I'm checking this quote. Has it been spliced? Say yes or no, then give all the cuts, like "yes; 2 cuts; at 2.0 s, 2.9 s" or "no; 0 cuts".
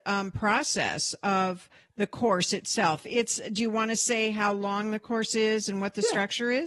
no; 0 cuts